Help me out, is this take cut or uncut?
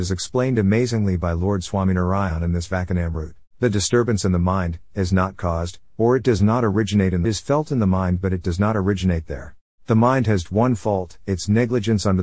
cut